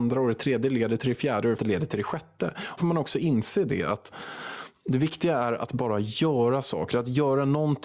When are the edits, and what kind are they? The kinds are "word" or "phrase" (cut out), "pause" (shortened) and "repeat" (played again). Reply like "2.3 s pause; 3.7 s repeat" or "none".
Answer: 1.6 s word; 2.8 s word

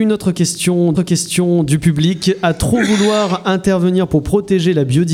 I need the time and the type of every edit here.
0.9 s repeat

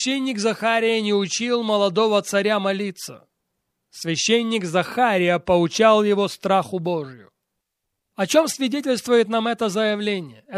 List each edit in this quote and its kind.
none

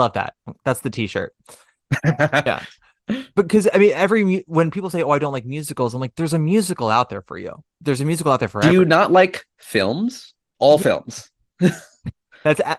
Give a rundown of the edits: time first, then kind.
10.5 s pause

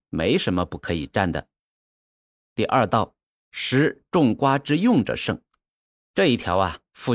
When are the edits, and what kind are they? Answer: none

